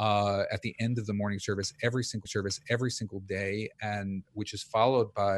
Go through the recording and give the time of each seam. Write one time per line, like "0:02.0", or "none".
0:02.3